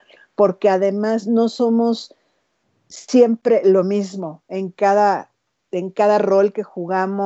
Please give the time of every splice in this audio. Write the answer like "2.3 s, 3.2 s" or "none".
none